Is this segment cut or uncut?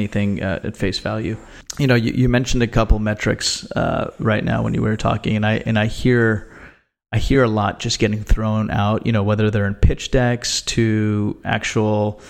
uncut